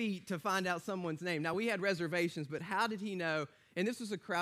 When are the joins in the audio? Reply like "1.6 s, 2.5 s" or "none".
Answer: none